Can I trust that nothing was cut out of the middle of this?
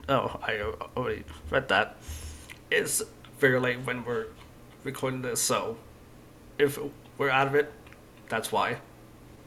yes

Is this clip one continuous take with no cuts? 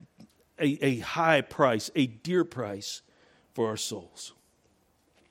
yes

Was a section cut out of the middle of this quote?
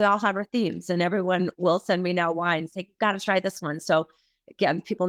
no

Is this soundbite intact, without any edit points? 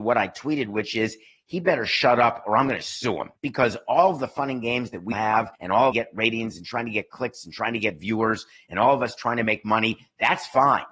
no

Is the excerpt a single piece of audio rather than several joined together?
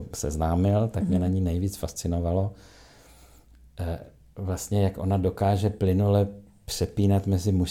yes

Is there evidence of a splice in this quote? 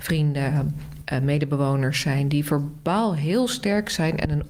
no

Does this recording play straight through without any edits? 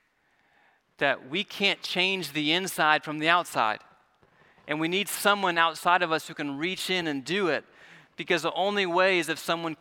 yes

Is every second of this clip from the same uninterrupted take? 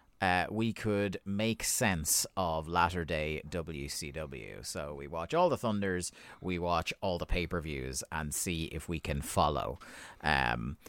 yes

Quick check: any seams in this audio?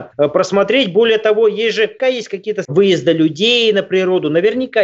yes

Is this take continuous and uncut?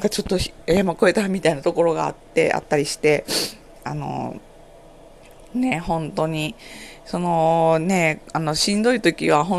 yes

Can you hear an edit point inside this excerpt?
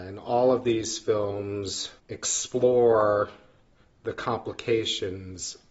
yes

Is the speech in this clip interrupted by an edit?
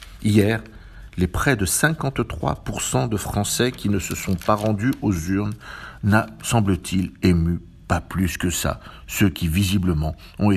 no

